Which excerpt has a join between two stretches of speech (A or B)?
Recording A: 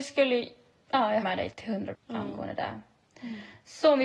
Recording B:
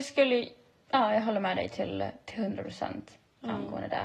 A